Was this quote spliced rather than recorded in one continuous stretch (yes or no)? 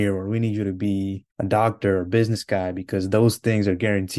yes